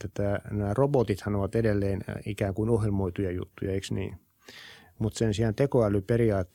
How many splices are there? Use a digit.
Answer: 0